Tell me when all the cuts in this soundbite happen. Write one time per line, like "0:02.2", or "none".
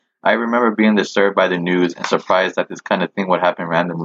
none